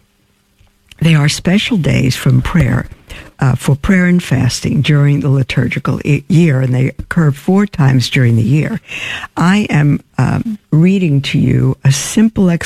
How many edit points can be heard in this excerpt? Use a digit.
1